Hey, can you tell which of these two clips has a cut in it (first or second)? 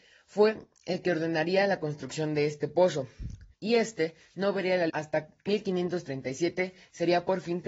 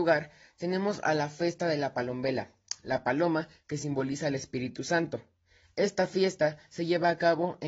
first